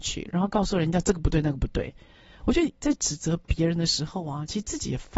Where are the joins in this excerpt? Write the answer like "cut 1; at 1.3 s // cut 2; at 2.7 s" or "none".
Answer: none